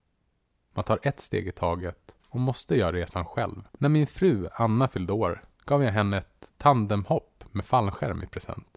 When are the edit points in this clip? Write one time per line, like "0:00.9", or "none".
0:03.7